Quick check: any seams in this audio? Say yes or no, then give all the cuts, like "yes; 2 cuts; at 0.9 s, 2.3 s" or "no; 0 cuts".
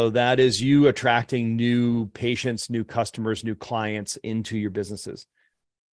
no; 0 cuts